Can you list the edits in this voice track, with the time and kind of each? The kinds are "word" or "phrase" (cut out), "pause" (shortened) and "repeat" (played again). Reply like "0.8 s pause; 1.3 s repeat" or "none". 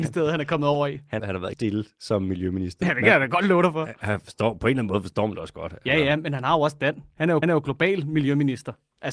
1.2 s word; 1.5 s word; 7.4 s repeat

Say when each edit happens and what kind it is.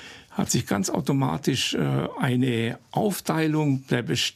none

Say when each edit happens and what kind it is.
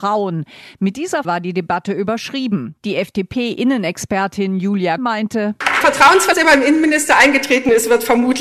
1.2 s word; 5.0 s word; 5.8 s word; 6.3 s word

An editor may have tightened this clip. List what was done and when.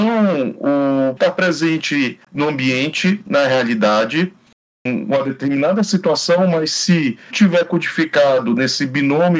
1.2 s word; 2.2 s pause; 4.8 s word; 7.3 s word

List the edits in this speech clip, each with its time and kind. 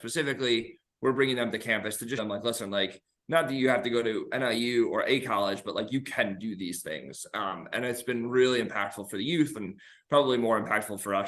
2.2 s word

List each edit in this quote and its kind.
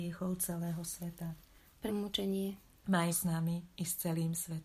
1.9 s phrase; 3.1 s word

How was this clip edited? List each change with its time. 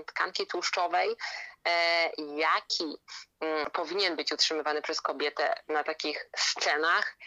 none

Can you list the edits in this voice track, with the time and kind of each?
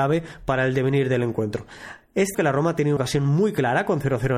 2.3 s word; 3.0 s word

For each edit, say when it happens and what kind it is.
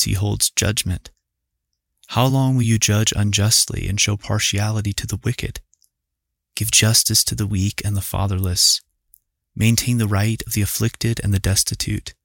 none

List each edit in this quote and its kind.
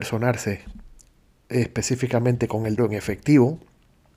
2.8 s word

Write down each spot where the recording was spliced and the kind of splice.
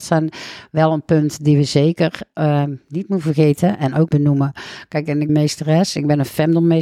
4.1 s word; 5.3 s phrase

